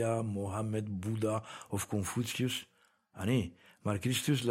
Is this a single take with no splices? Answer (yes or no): yes